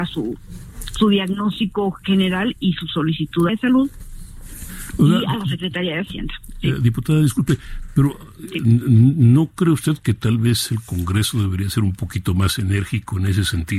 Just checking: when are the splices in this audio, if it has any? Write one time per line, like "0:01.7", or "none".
0:03.5